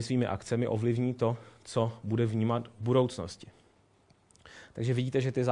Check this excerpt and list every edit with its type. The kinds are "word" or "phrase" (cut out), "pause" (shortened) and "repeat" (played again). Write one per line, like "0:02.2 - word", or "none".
none